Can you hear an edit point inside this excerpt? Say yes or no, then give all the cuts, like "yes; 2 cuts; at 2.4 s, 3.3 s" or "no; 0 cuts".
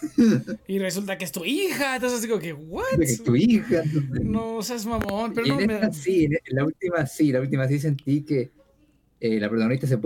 no; 0 cuts